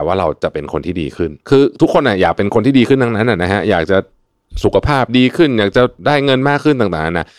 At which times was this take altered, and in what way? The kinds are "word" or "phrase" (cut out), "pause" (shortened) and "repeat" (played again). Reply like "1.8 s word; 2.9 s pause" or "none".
1.4 s pause